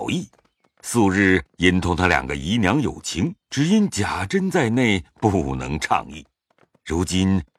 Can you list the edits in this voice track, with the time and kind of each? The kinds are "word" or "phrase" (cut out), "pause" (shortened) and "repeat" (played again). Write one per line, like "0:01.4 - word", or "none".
0:03.4 - pause